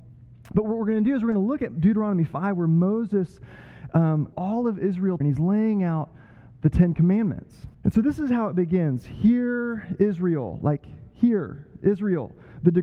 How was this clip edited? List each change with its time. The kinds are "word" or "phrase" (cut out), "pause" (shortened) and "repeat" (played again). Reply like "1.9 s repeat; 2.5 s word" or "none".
4.3 s word; 5.2 s word; 7.7 s pause